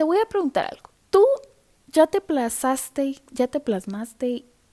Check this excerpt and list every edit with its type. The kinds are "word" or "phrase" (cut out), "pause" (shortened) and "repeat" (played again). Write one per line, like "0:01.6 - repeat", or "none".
none